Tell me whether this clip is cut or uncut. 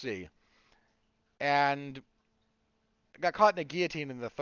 uncut